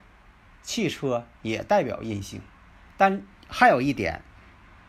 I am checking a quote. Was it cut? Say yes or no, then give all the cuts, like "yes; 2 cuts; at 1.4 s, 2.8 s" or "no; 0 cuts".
no; 0 cuts